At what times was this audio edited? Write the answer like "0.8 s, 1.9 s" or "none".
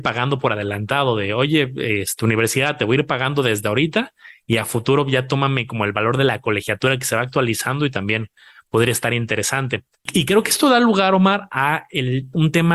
none

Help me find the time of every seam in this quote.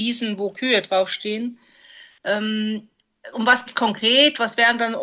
3.3 s, 3.7 s

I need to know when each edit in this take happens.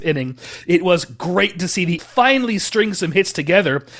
2.0 s

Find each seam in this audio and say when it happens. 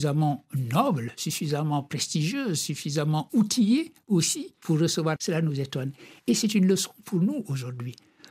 4.6 s, 5.2 s

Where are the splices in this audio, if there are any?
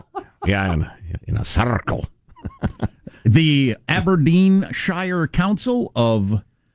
1.2 s, 3.8 s

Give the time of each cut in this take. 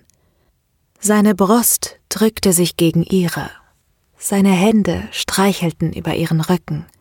none

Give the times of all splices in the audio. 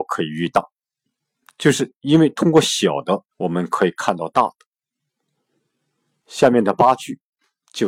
3.3 s

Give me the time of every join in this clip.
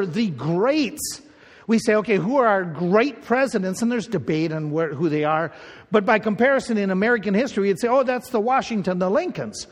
none

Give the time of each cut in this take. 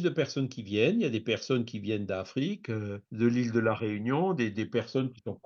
3.0 s

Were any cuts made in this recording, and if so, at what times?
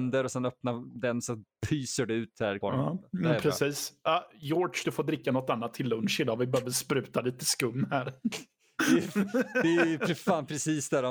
2.6 s

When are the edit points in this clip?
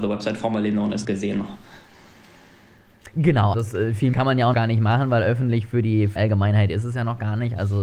1.0 s, 3.5 s, 4.1 s, 4.5 s, 6.2 s

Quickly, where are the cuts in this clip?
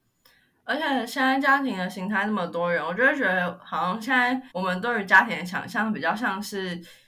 4.5 s

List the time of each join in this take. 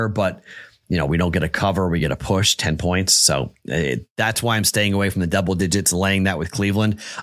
none

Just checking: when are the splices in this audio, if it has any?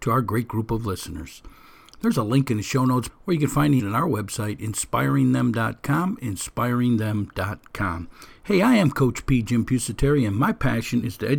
3.1 s, 3.8 s

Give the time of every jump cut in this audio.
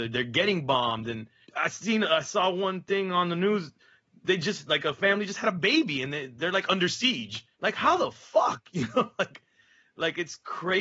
1.4 s, 7.5 s

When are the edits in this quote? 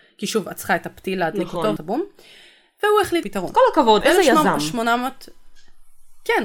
1.8 s, 3.2 s, 4.0 s

